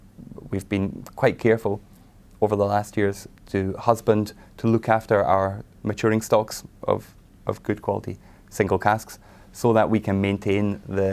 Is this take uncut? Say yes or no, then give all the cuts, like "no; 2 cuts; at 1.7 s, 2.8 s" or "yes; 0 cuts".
yes; 0 cuts